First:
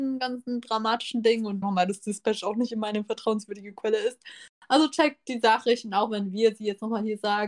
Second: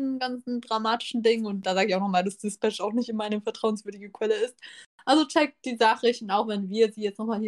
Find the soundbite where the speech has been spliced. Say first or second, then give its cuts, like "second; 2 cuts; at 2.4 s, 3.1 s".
first; 1 cut; at 1.6 s